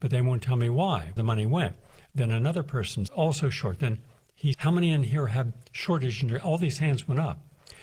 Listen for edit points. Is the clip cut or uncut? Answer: cut